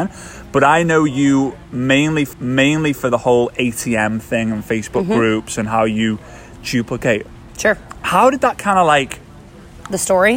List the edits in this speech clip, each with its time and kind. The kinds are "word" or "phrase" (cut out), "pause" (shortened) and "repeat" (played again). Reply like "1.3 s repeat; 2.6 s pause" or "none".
2.3 s repeat